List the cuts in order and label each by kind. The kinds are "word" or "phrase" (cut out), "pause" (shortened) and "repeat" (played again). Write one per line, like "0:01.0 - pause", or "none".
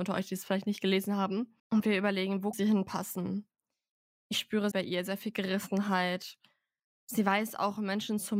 0:01.6 - pause
0:02.5 - word
0:04.7 - phrase